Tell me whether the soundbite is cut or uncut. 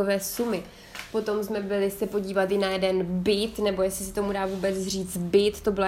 uncut